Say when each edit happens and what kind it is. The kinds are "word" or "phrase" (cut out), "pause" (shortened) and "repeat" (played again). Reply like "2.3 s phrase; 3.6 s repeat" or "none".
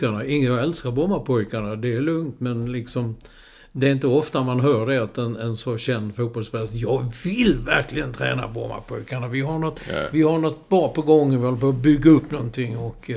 none